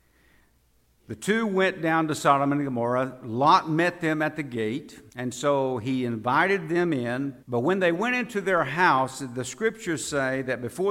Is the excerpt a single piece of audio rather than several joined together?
no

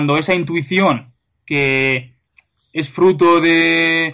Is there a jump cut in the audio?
no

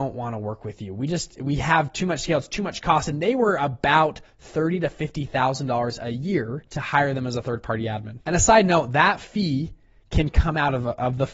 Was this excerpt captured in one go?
yes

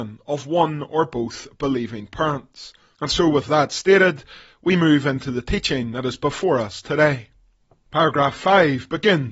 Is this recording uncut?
no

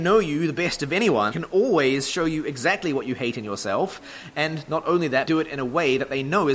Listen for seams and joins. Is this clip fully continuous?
no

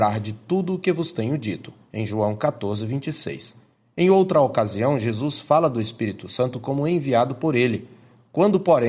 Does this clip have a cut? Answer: no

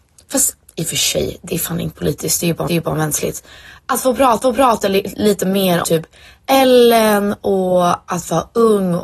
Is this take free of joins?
no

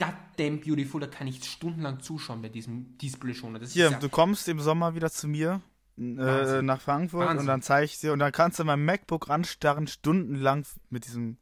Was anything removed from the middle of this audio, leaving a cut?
no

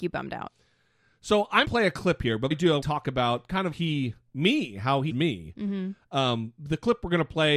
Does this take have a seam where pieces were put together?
yes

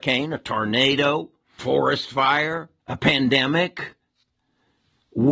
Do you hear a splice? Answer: yes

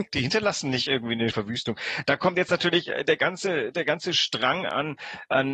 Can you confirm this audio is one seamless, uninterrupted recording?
no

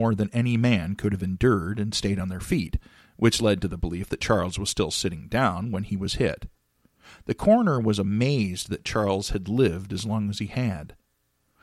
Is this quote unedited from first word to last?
yes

